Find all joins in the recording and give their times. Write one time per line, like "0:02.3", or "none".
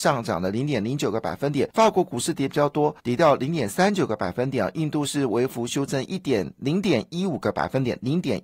0:01.7
0:03.0

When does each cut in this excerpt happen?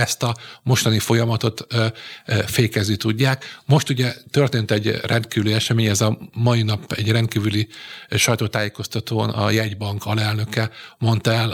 none

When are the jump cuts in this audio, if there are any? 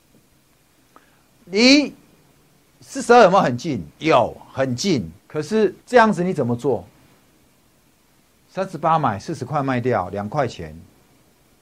0:03.9
0:05.2
0:05.8

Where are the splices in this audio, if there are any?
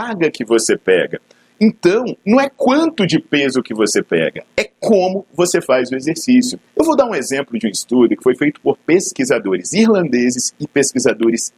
0:06.7

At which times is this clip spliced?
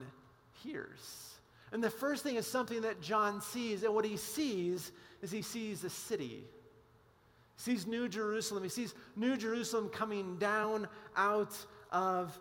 none

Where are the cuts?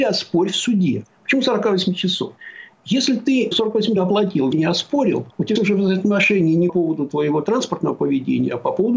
0:04.0
0:04.5
0:05.6
0:06.7

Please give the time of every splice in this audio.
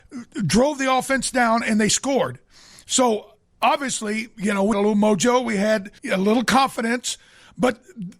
0:04.7
0:06.0

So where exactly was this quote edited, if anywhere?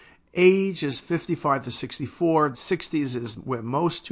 0:02.5

